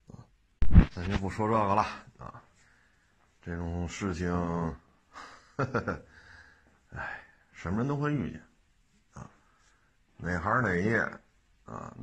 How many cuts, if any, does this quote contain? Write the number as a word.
zero